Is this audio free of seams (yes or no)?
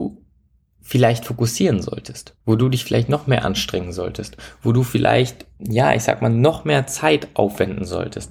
no